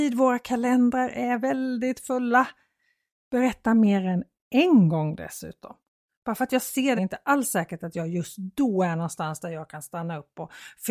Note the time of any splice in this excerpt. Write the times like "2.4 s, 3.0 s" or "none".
7.0 s